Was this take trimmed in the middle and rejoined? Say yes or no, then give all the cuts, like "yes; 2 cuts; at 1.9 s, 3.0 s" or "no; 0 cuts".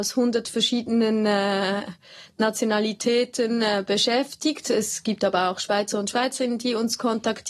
no; 0 cuts